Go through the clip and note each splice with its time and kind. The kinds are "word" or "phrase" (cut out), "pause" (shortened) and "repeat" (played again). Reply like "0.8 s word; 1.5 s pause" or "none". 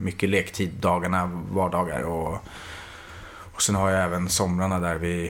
none